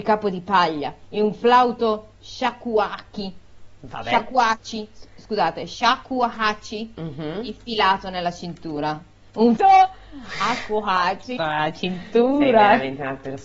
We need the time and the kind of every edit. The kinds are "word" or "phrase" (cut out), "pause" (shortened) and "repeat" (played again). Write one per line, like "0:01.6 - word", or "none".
0:02.2 - pause
0:09.6 - word
0:11.4 - word

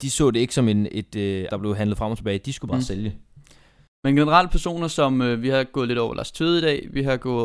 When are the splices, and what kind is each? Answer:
0:01.5 - word

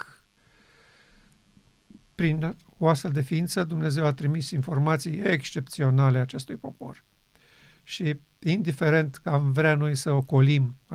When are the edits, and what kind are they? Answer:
0:09.2 - word

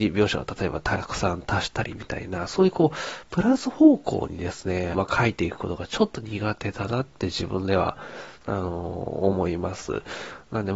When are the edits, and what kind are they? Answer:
0:04.9 - phrase
0:08.4 - pause

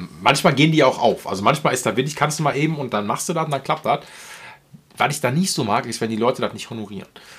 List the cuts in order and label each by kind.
none

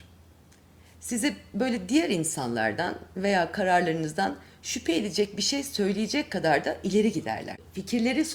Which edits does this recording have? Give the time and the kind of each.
none

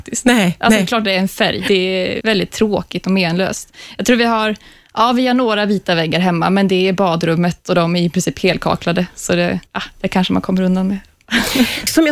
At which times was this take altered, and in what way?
0:01.7 - word
0:02.2 - word
0:09.7 - pause

